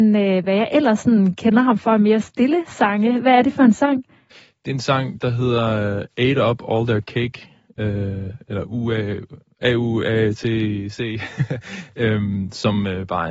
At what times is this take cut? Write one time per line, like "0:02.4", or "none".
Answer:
none